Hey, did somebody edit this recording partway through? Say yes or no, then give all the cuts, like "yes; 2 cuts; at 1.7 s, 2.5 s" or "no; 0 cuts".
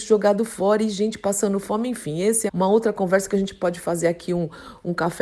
yes; 1 cut; at 2.5 s